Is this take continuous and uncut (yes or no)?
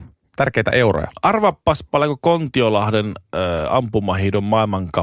yes